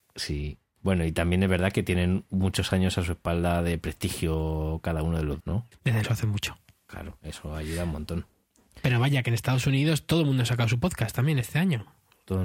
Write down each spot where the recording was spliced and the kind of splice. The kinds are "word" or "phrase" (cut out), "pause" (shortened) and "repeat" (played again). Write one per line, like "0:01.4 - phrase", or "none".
0:05.4 - word
0:06.0 - word
0:11.4 - word